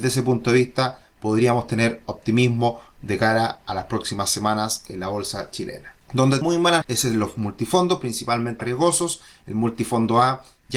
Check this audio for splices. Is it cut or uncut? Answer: cut